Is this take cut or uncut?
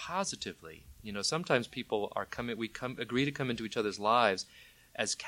uncut